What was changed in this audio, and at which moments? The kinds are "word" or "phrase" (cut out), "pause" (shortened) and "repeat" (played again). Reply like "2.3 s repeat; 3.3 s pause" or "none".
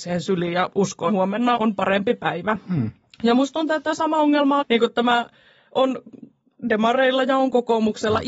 1.1 s word; 1.6 s word; 4.6 s word